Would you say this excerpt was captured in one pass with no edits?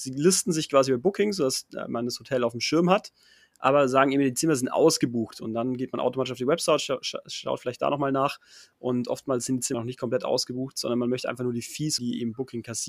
no; 2 cuts; at 9.7 s, 12.0 s

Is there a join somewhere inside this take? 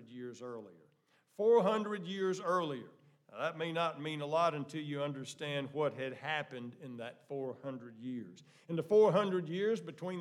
no; 0 cuts

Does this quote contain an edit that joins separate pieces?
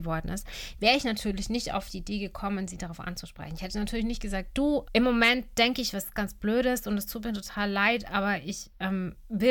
yes; 2 cuts; at 4.9 s, 6.1 s

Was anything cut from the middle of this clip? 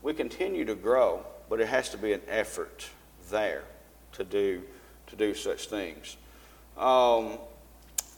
no; 0 cuts

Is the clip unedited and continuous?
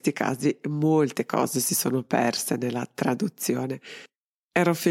yes; 0 cuts

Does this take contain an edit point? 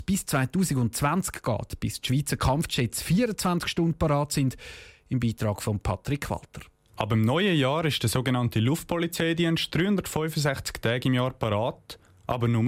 no; 0 cuts

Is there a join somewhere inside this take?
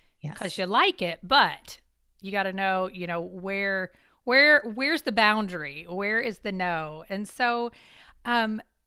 no; 0 cuts

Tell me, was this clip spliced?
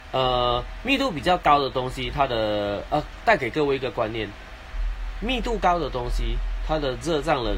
no; 0 cuts

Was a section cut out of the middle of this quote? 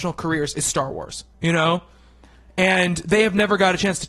yes; 1 cut; at 1.3 s

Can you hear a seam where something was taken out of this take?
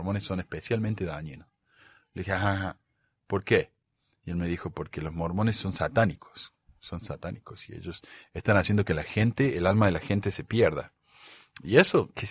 no; 0 cuts

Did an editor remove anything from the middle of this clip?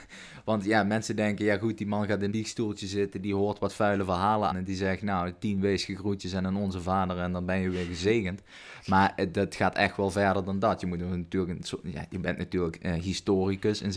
yes; 2 cuts; at 2.3 s, 4.5 s

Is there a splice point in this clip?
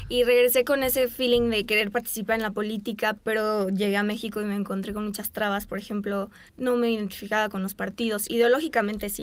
yes; 2 cuts; at 3.2 s, 6.5 s

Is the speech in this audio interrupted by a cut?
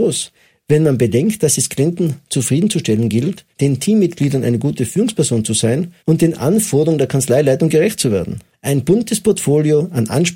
yes; 3 cuts; at 3.5 s, 6.0 s, 8.5 s

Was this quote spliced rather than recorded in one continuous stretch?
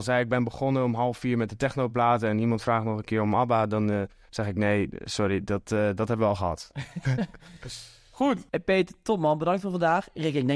yes; 1 cut; at 8.5 s

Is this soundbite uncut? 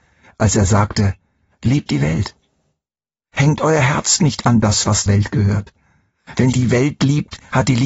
no; 3 cuts; at 1.9 s, 5.1 s, 6.5 s

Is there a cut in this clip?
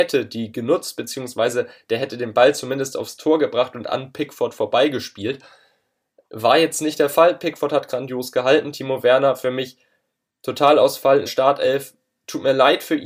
yes; 1 cut; at 11.3 s

